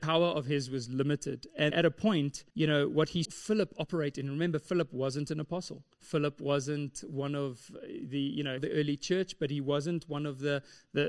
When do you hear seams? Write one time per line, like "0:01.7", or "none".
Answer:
0:01.7
0:02.5
0:03.2
0:05.9
0:08.6